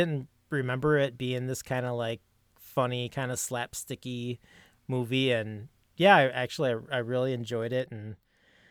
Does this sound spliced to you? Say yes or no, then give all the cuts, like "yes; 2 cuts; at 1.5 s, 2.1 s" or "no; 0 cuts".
no; 0 cuts